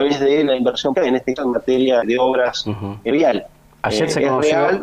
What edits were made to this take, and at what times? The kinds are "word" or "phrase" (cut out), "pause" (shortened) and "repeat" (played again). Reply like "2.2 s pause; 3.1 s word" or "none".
1.0 s word; 1.4 s word; 2.0 s word; 3.1 s word